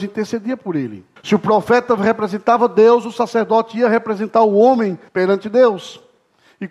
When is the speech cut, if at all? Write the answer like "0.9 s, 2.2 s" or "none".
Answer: 1.2 s, 5.1 s